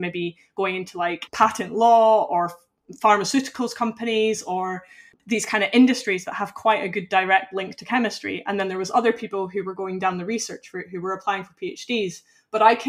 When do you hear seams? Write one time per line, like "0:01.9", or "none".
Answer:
none